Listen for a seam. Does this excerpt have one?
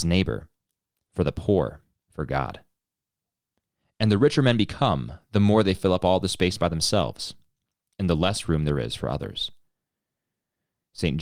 yes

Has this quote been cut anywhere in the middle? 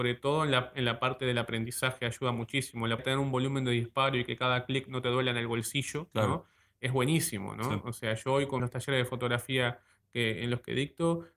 yes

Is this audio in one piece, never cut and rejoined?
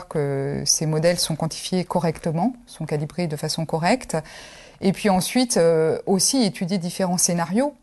yes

